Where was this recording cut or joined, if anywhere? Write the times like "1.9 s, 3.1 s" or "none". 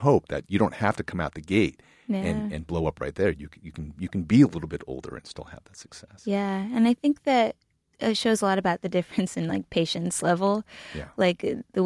none